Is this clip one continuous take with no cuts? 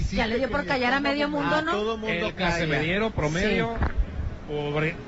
yes; 0 cuts

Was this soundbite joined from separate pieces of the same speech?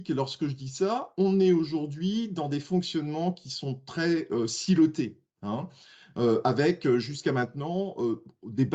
no; 0 cuts

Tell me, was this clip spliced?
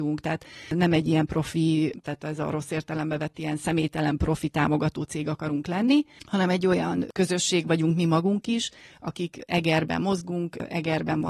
no; 0 cuts

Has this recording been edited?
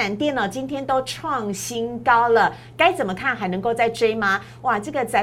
no; 0 cuts

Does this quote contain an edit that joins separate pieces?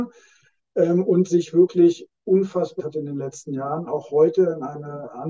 yes; 1 cut; at 2.8 s

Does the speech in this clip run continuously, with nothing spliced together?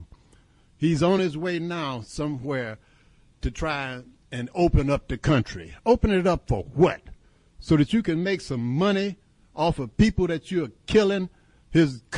yes; 0 cuts

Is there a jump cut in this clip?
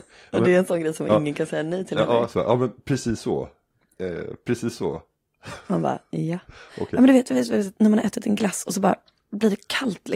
no; 0 cuts

